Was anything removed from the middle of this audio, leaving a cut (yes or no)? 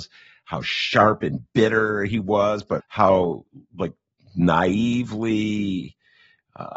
yes